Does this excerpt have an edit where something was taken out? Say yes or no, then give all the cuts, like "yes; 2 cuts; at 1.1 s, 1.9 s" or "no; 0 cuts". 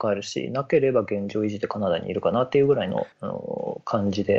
yes; 1 cut; at 3.1 s